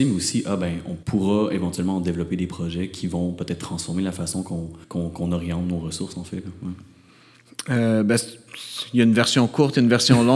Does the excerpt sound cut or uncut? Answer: cut